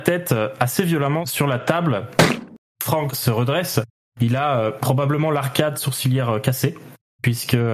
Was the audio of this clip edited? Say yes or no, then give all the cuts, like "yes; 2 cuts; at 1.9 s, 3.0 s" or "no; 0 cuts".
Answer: no; 0 cuts